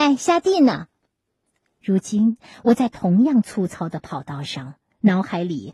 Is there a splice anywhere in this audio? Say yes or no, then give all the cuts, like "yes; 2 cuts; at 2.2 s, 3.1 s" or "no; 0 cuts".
no; 0 cuts